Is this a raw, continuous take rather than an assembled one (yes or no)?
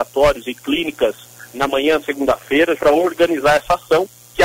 no